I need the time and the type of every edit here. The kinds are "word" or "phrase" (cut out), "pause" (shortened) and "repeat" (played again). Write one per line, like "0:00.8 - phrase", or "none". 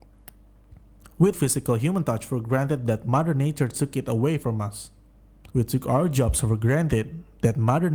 0:01.3 - word
0:05.5 - pause